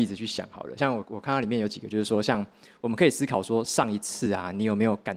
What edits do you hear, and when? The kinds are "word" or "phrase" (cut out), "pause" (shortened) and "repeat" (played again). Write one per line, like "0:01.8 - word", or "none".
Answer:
none